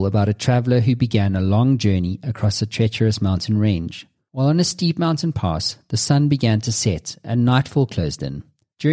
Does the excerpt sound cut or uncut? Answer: uncut